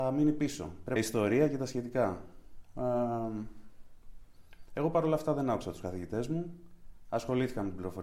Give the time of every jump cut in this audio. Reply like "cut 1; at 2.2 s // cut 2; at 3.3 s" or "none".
cut 1; at 1.0 s